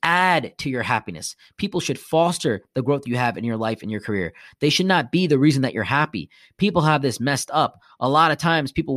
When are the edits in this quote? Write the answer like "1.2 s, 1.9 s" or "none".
none

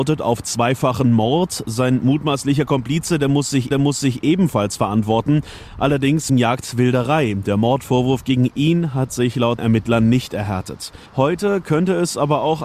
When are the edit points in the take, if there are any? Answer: 3.7 s, 6.3 s, 9.6 s, 11.1 s

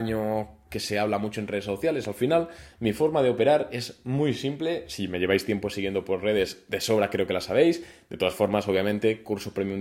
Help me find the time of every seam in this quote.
none

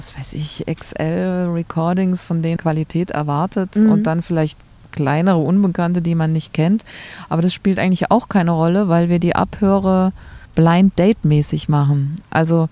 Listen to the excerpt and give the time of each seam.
2.6 s, 10.5 s

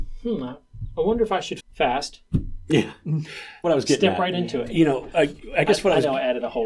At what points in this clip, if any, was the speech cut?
1.6 s, 3.6 s

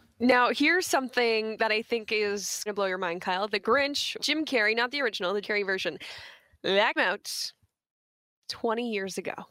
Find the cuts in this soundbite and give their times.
2.7 s, 4.2 s, 5.4 s, 7.0 s

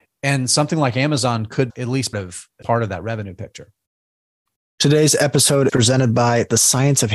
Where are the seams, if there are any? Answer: 1.7 s, 2.1 s, 2.6 s, 5.7 s

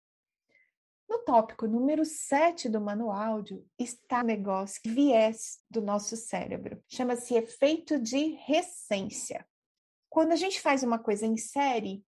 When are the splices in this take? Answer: 4.2 s, 4.9 s, 5.6 s, 6.8 s, 9.8 s

